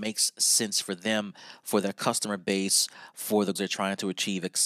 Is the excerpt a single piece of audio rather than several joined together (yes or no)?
no